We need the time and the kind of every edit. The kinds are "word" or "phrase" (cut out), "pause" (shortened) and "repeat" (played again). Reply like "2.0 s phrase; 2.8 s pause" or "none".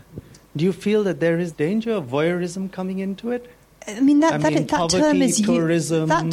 1.5 s word